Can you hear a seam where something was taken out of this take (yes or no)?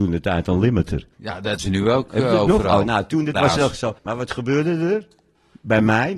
yes